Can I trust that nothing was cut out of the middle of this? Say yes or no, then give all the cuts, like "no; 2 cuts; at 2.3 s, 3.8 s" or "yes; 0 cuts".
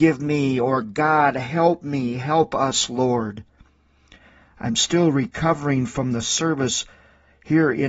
yes; 0 cuts